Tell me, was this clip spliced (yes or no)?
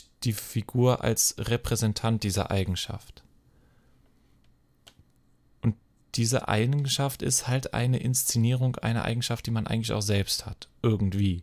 no